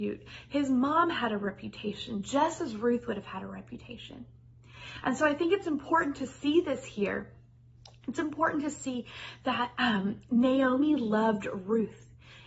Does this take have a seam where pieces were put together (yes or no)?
no